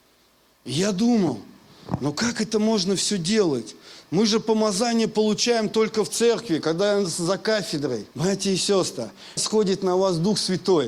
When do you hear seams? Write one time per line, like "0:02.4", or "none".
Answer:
0:08.1
0:09.4